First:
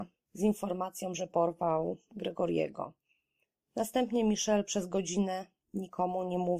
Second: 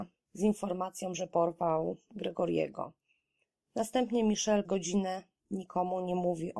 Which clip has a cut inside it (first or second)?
second